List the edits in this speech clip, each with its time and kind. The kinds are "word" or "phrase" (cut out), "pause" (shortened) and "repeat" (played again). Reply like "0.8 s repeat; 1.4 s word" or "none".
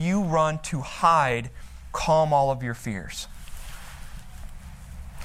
1.9 s word